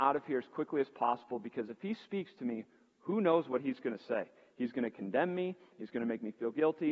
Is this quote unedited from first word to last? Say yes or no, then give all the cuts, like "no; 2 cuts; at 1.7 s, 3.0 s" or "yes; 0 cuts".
yes; 0 cuts